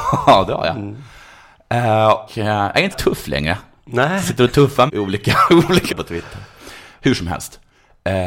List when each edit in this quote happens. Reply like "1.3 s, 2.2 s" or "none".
2.3 s, 2.9 s, 4.9 s, 5.9 s